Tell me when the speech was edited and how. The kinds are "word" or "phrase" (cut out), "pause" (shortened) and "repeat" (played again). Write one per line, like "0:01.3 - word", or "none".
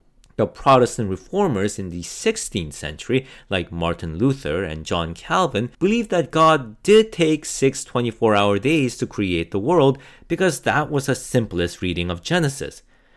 0:05.7 - pause